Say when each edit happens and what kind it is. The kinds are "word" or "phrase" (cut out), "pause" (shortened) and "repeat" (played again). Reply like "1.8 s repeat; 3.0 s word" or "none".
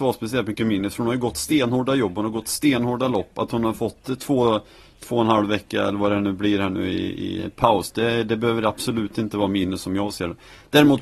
none